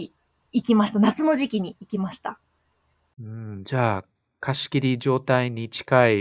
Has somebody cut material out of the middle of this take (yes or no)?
no